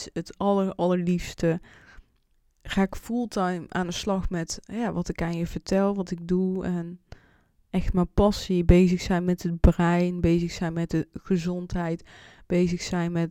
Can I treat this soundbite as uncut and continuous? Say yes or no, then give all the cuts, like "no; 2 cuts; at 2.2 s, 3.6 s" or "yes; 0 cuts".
no; 1 cut; at 2.3 s